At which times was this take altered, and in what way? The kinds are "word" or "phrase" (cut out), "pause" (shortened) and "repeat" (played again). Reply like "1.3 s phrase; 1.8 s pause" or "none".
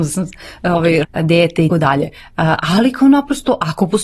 1.0 s word; 1.7 s word